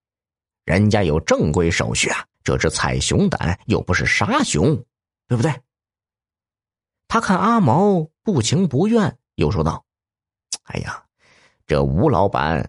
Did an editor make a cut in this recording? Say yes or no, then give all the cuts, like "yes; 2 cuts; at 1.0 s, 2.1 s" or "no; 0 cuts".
yes; 1 cut; at 2.3 s